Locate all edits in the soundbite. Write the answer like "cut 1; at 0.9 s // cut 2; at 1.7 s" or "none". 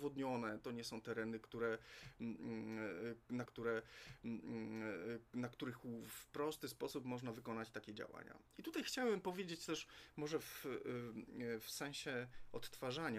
cut 1; at 3.5 s

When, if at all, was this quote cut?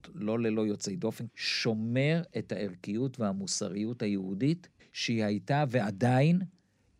cut 1; at 1.3 s // cut 2; at 4.8 s

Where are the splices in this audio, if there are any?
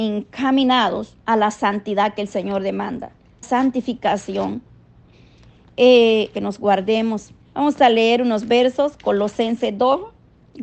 cut 1; at 1.2 s // cut 2; at 3.4 s // cut 3; at 6.3 s // cut 4; at 7.4 s

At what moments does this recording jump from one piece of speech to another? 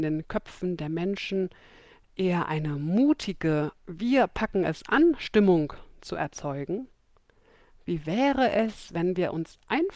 none

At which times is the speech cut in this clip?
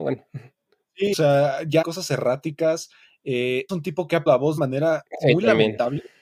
cut 1; at 1.1 s // cut 2; at 1.8 s // cut 3; at 3.7 s // cut 4; at 4.3 s // cut 5; at 4.6 s

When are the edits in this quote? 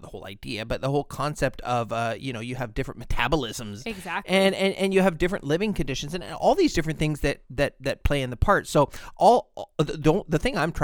cut 1; at 7.4 s

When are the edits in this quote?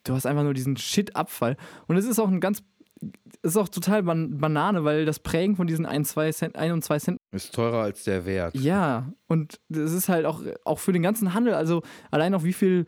cut 1; at 7.2 s // cut 2; at 9.6 s

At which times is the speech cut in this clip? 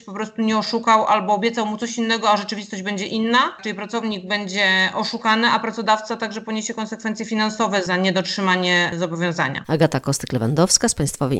none

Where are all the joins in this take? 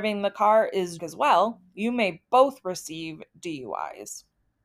cut 1; at 1.0 s

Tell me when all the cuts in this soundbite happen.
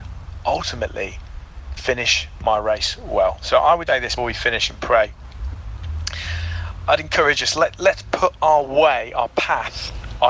cut 1; at 1.8 s // cut 2; at 3.9 s // cut 3; at 4.2 s

